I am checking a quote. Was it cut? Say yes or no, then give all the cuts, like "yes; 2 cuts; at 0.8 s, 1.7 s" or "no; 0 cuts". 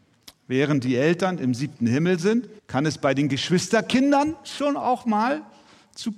yes; 1 cut; at 2.6 s